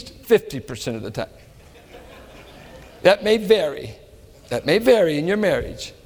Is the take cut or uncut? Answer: uncut